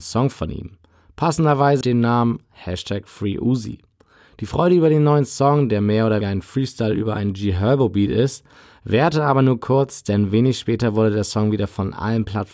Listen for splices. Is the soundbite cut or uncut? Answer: cut